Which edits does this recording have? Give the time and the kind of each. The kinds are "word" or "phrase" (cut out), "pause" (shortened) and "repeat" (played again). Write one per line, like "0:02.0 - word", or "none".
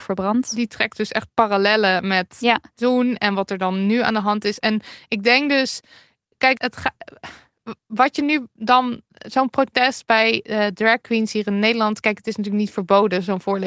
0:06.6 - word